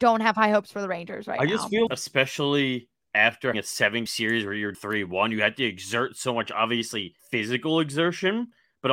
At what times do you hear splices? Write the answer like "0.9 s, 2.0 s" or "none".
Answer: 1.9 s, 3.5 s, 4.1 s, 4.7 s, 7.2 s

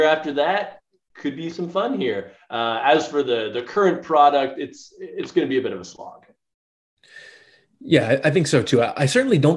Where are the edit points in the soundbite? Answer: none

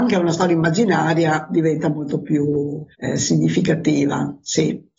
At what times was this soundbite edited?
2.9 s

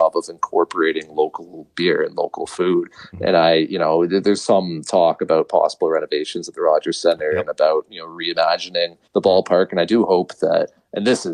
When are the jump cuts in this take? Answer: 9.1 s

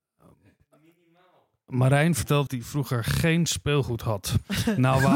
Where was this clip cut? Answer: 2.5 s

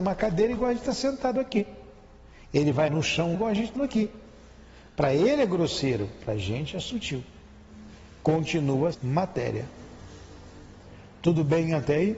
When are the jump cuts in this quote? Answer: 2.9 s, 3.3 s, 3.8 s, 8.9 s

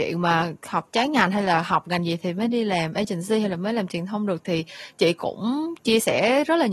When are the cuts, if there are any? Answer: none

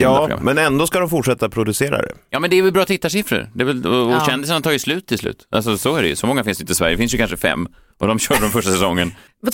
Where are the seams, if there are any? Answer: none

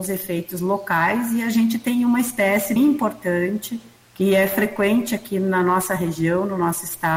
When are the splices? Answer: 2.8 s, 4.0 s

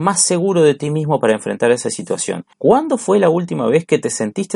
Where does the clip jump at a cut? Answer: 2.5 s

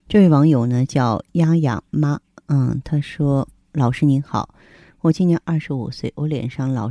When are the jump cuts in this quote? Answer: none

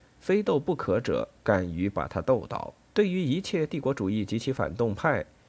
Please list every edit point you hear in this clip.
2.8 s

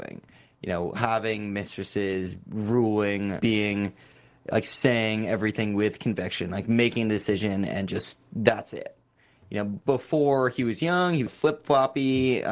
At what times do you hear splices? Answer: 3.4 s, 11.3 s

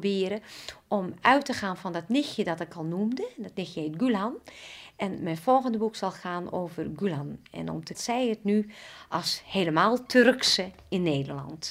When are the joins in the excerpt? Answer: 7.9 s

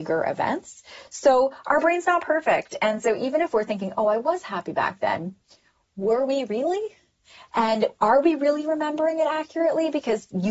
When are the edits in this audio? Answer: none

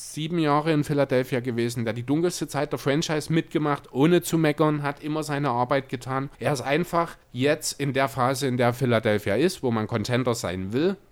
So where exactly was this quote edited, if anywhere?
6.3 s, 7.2 s

